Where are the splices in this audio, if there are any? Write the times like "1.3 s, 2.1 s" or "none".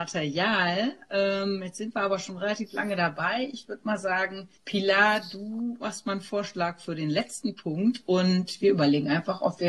4.6 s